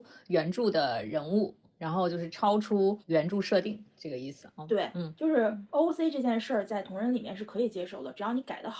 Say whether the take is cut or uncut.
cut